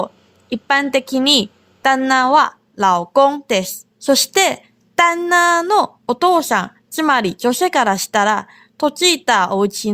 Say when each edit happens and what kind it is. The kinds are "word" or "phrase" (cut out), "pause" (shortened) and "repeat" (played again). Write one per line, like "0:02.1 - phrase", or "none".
0:03.9 - pause